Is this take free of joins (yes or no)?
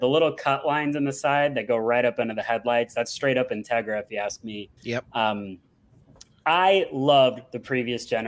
no